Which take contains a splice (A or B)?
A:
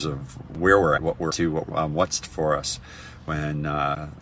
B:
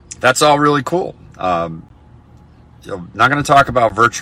A